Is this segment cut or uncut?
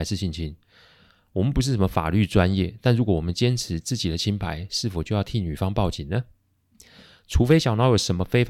uncut